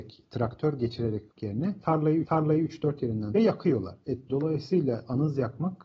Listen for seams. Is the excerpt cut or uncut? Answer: cut